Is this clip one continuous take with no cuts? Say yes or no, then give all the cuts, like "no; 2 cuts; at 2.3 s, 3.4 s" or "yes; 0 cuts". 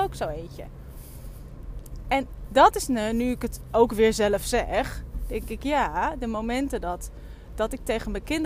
yes; 0 cuts